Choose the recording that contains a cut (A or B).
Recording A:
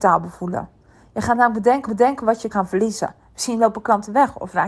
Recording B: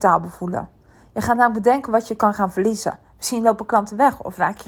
A